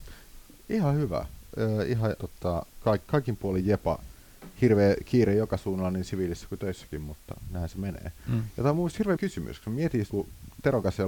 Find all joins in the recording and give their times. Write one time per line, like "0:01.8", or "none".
0:02.2
0:02.7
0:09.2
0:10.1